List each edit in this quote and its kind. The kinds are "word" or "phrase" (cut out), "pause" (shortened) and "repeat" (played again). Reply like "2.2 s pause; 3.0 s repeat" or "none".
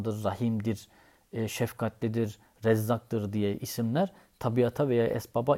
none